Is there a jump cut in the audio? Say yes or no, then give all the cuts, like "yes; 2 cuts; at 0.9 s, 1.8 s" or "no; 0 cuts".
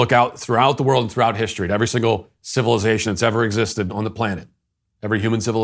no; 0 cuts